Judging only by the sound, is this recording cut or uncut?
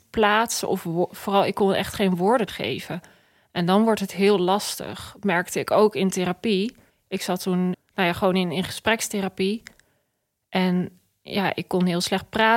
cut